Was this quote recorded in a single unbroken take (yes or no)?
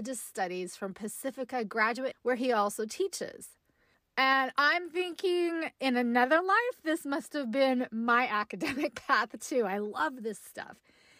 no